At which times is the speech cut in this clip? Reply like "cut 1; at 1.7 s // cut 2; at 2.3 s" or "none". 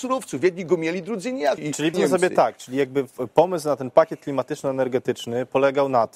cut 1; at 1.6 s // cut 2; at 1.9 s